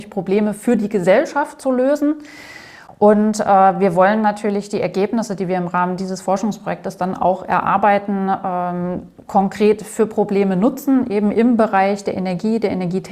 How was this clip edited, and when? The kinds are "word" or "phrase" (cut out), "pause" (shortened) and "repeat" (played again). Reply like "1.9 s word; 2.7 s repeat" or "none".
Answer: none